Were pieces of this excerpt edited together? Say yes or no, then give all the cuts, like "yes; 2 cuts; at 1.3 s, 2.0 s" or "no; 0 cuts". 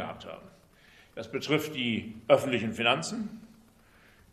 no; 0 cuts